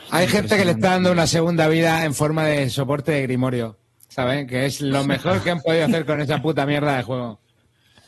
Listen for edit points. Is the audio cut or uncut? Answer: uncut